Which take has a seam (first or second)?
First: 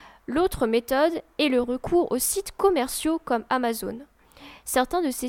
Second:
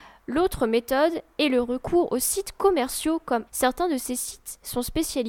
second